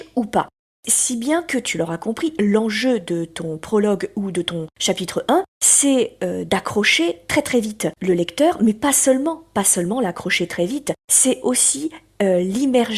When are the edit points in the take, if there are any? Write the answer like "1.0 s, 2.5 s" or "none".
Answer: 5.5 s, 8.0 s, 11.0 s